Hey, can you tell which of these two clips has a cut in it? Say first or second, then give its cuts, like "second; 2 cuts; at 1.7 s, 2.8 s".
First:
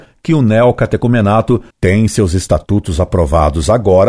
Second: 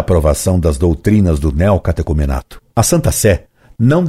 first; 1 cut; at 1.7 s